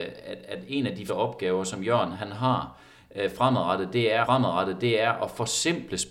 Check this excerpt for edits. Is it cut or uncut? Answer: cut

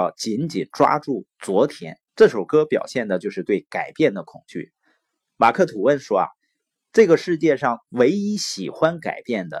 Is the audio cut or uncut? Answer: cut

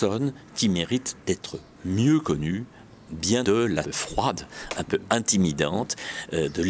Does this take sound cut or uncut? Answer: cut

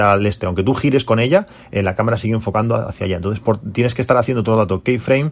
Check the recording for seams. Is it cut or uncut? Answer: uncut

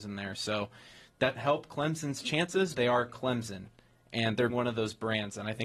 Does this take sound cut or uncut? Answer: cut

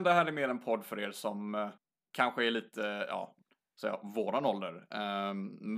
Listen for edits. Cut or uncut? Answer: uncut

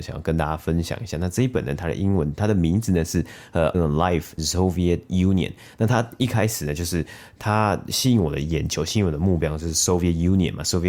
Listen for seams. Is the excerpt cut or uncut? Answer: cut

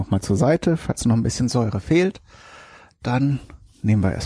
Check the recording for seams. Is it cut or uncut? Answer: uncut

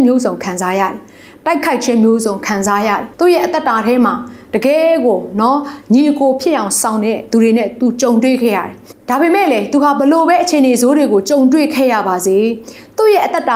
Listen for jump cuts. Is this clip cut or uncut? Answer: cut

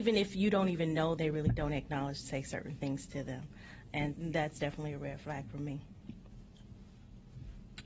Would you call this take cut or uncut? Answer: cut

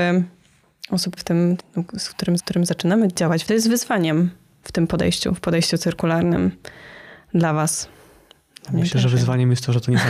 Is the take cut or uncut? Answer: cut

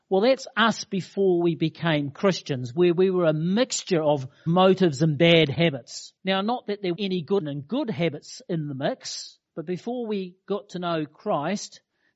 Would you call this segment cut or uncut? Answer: cut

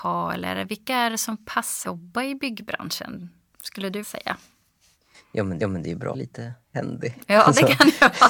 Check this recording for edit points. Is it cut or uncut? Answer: cut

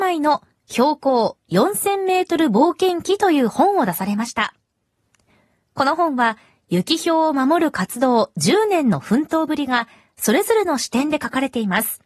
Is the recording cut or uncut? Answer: uncut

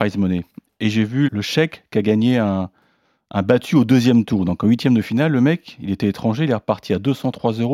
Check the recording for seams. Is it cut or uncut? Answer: cut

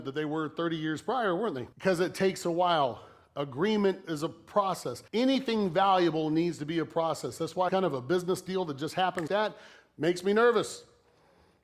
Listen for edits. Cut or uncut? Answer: cut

